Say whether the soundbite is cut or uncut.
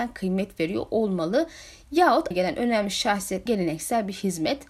cut